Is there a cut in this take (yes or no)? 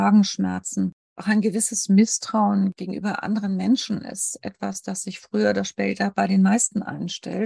no